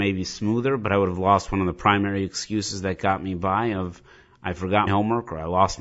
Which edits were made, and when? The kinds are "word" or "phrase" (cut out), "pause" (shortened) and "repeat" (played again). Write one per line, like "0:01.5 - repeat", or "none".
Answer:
0:04.9 - word